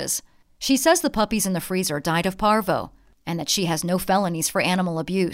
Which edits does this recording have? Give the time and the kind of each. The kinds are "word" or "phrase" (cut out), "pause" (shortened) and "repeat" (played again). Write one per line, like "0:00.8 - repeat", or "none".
none